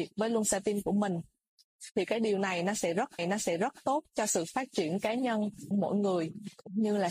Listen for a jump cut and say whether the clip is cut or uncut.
cut